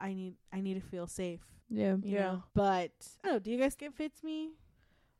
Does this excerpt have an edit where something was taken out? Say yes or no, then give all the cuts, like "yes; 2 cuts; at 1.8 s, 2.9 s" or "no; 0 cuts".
yes; 4 cuts; at 1.6 s, 2.5 s, 3.2 s, 3.8 s